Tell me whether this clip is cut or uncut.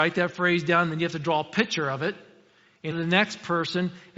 cut